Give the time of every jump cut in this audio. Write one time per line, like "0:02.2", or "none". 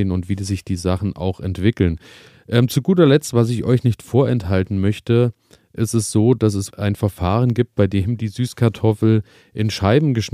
0:06.7